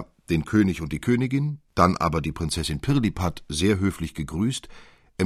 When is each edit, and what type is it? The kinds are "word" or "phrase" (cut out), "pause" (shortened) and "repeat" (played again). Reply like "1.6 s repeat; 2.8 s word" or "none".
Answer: none

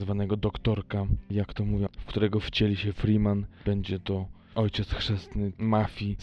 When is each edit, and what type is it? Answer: 1.9 s word

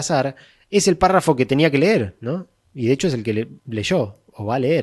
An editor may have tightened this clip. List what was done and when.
3.6 s pause

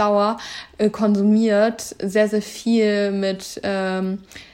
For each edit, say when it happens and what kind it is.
none

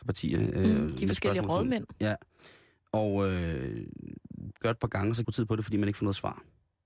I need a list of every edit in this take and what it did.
4.6 s phrase; 5.2 s phrase

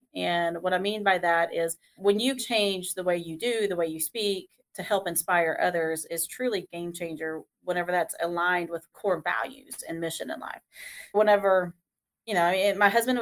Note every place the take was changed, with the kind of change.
2.0 s word; 2.4 s word; 6.1 s word; 8.9 s word; 11.1 s word

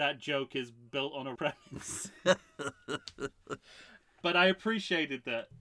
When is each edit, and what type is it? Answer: 1.3 s word; 4.2 s word

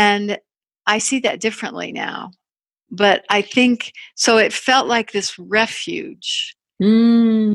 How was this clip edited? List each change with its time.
none

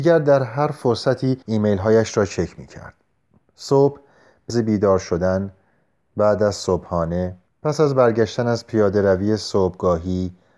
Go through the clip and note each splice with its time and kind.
1.4 s pause; 4.5 s word; 7.5 s pause

